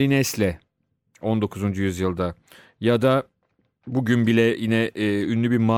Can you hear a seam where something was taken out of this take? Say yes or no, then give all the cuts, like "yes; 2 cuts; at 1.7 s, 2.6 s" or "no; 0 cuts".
no; 0 cuts